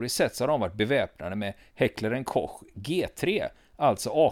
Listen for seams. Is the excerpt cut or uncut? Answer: uncut